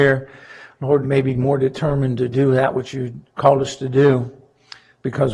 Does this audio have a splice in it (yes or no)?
yes